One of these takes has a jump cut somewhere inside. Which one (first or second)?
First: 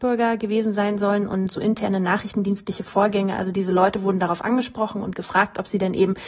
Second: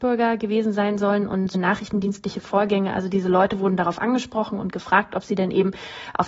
second